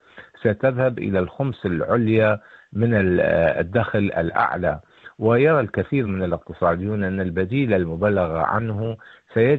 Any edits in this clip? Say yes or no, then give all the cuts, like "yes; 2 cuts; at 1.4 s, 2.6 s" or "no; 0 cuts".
no; 0 cuts